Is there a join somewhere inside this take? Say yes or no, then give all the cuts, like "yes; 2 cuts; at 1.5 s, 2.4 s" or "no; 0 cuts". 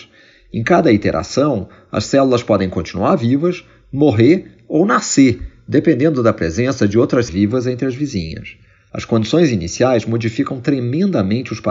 yes; 1 cut; at 7.3 s